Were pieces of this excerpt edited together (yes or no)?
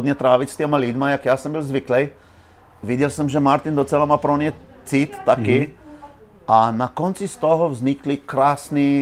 no